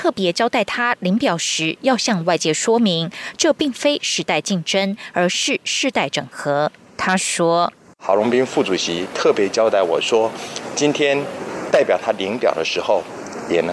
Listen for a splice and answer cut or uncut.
uncut